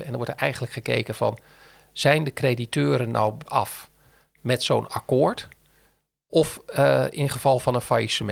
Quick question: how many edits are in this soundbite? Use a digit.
1